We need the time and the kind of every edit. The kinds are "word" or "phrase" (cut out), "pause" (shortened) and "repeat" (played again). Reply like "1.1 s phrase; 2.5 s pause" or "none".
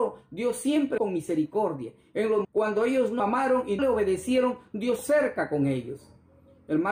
1.0 s word; 2.4 s word; 3.2 s word; 3.8 s word; 5.0 s word